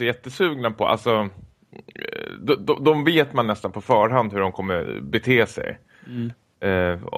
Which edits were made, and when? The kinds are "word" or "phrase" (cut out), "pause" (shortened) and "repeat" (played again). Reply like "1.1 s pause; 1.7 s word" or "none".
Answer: none